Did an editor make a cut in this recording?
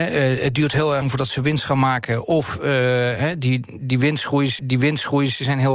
yes; 2 cuts; at 1.0 s, 4.6 s

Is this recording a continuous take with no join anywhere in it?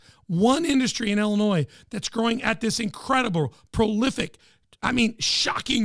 yes; 0 cuts

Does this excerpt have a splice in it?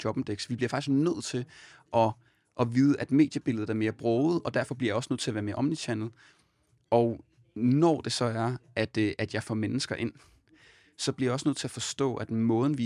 no; 0 cuts

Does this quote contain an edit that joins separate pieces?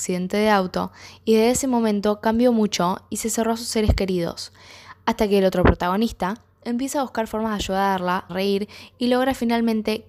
yes; 1 cut; at 8.3 s

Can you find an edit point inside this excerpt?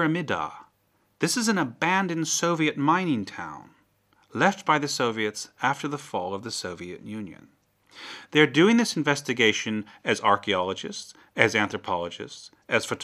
no; 0 cuts

